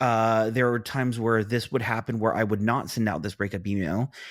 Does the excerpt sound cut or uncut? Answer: uncut